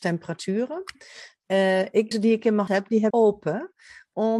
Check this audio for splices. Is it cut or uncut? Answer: cut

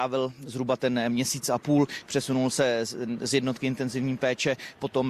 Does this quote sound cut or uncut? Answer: uncut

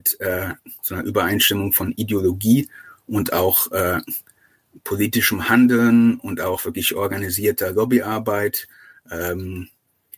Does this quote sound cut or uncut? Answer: uncut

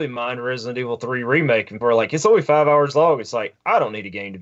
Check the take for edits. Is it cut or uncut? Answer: cut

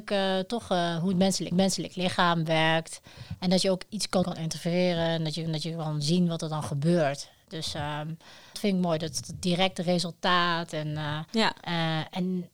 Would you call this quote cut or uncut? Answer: cut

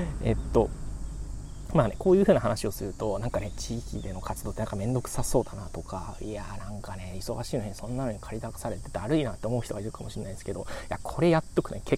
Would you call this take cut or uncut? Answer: uncut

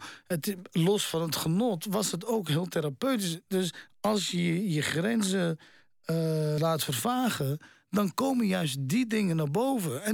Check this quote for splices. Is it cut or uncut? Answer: cut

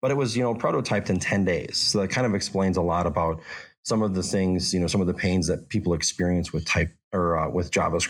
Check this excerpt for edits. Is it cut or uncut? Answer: uncut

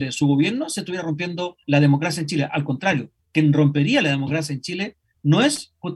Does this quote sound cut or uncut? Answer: cut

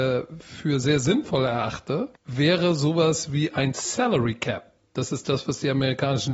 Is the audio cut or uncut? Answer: cut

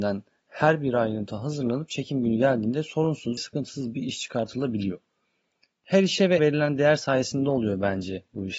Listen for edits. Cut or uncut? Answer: cut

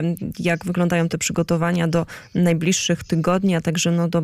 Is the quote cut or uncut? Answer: uncut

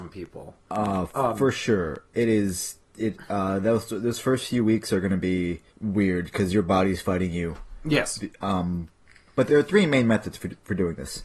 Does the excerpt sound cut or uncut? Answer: cut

